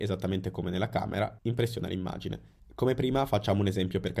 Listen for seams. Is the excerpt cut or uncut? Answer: uncut